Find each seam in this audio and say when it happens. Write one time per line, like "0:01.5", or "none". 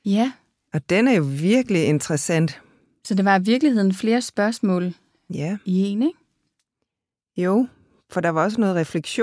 none